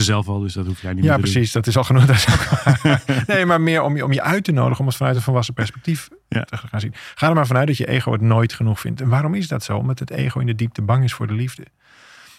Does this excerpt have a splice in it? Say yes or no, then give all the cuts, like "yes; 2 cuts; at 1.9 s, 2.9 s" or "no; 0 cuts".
no; 0 cuts